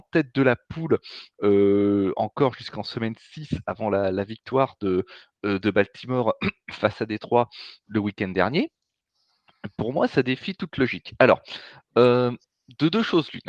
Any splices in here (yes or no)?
no